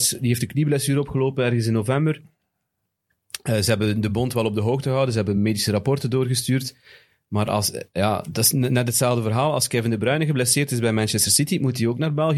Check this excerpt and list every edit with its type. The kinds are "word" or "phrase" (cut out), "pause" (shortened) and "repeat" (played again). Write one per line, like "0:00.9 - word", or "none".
none